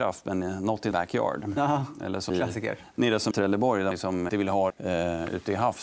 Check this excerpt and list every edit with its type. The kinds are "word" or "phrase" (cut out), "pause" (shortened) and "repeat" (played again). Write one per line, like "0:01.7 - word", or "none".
0:00.9 - word
0:02.3 - word
0:03.3 - word
0:03.9 - word
0:04.3 - word
0:04.7 - word